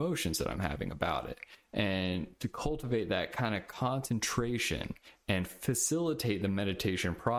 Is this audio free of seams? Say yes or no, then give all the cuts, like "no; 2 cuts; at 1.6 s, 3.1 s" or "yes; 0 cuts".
yes; 0 cuts